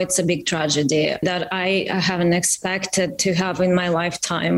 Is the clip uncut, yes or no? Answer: yes